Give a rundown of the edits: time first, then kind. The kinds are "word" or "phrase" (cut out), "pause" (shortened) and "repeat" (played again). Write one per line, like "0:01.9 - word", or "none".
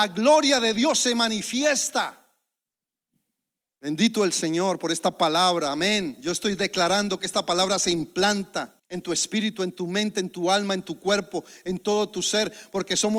0:08.8 - pause